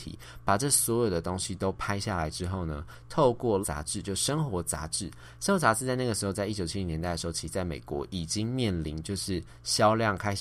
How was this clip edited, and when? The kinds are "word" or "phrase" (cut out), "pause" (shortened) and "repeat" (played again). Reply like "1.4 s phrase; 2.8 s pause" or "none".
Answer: 3.6 s word